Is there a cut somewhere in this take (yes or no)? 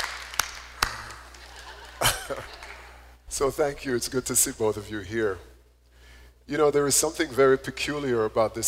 no